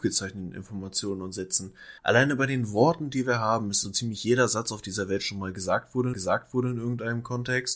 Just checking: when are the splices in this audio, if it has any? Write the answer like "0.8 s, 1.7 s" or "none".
2.0 s, 3.8 s, 6.1 s